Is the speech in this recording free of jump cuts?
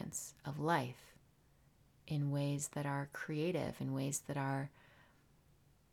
yes; 0 cuts

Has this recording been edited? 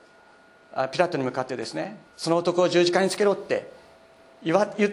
yes; 1 cut; at 2.1 s

